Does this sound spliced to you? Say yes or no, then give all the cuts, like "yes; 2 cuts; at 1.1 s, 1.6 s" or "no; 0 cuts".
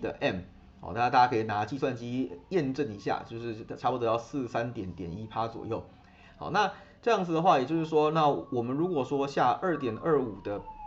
no; 0 cuts